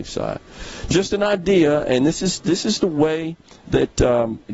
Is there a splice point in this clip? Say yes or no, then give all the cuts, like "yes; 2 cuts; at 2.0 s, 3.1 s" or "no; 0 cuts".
no; 0 cuts